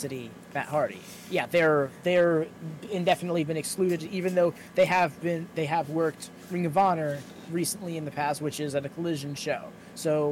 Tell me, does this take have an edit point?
no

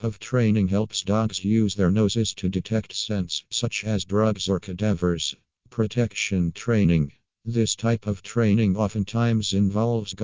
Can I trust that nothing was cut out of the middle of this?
yes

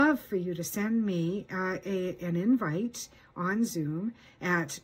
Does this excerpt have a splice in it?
no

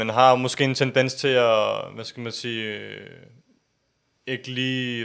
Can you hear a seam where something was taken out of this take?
no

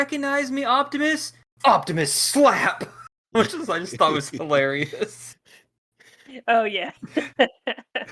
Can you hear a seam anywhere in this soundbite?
no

